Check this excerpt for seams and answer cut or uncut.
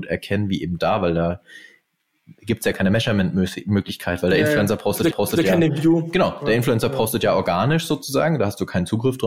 cut